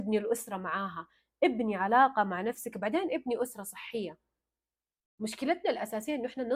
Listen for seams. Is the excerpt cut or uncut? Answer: uncut